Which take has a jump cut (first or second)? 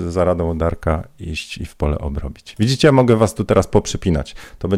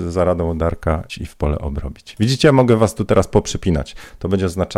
second